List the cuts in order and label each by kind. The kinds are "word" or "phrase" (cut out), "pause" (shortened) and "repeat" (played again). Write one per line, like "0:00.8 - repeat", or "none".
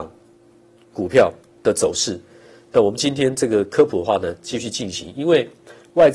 none